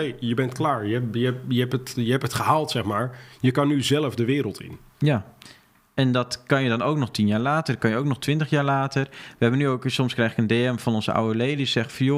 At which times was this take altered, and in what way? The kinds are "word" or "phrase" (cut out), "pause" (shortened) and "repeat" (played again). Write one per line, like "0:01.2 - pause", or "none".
none